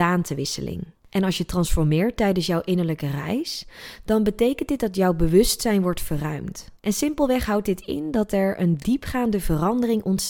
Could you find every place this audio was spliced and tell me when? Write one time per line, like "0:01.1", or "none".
0:01.0
0:06.8